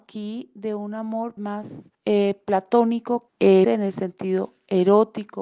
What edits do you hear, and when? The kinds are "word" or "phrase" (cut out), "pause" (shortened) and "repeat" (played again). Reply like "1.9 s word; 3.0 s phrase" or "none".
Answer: 1.4 s word; 1.9 s pause; 3.3 s word; 3.6 s word